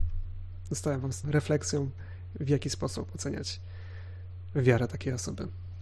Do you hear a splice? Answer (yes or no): yes